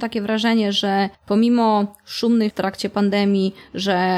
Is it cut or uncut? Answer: cut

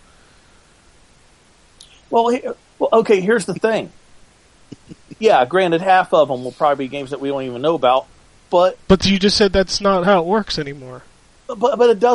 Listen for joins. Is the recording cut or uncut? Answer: uncut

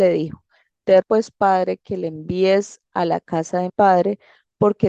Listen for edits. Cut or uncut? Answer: cut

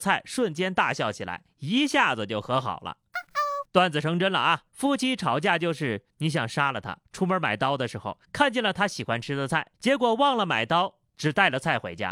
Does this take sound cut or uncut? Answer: cut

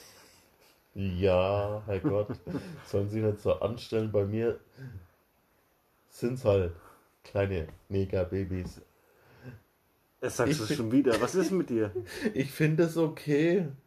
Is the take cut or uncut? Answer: uncut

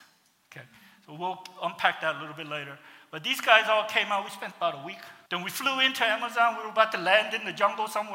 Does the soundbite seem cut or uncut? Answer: cut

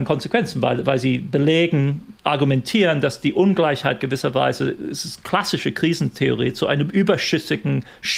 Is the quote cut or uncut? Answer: cut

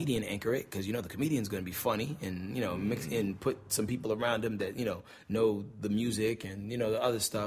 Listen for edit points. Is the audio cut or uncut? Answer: uncut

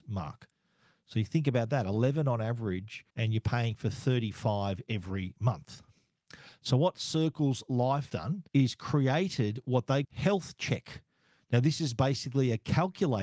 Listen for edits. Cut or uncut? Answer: cut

